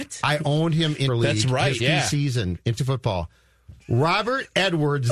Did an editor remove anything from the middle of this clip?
yes; 4 cuts; at 1.1 s, 1.8 s, 2.8 s, 3.8 s

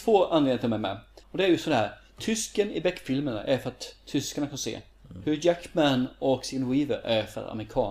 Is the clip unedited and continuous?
no; 1 cut; at 1.2 s

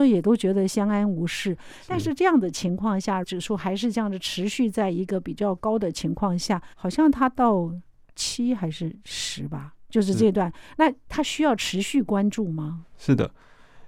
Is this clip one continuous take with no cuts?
no; 4 cuts; at 3.2 s, 6.7 s, 7.9 s, 12.9 s

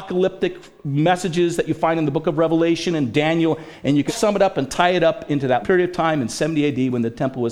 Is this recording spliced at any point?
yes; 2 cuts; at 4.1 s, 5.6 s

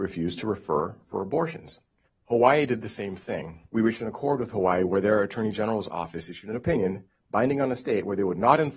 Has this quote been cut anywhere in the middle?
yes; 2 cuts; at 2.1 s, 3.6 s

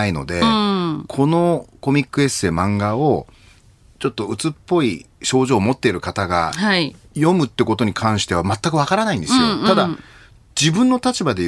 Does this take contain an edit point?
no; 0 cuts

